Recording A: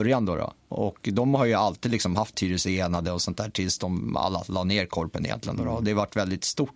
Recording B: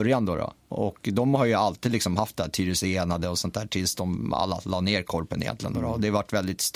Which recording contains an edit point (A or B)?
A